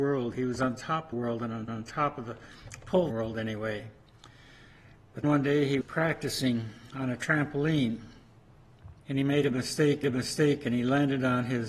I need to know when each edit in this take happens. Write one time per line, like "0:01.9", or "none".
0:01.1
0:01.7
0:03.1
0:05.2
0:05.8
0:09.0
0:10.0